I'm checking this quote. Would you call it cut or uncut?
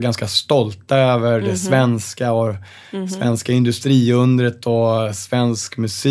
uncut